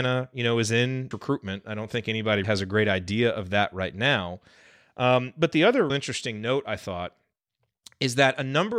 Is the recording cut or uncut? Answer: cut